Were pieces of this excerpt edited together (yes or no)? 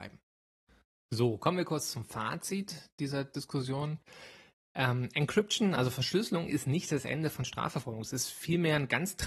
no